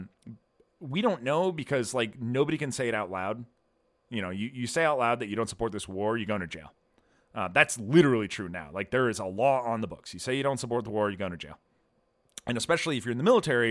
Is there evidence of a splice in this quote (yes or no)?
no